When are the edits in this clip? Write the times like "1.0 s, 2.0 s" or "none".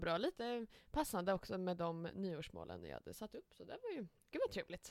none